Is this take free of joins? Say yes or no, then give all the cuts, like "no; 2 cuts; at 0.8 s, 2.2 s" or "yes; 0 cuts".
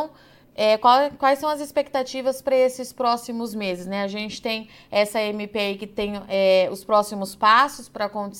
yes; 0 cuts